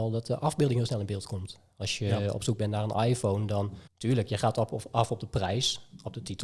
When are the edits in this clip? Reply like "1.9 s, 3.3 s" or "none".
3.9 s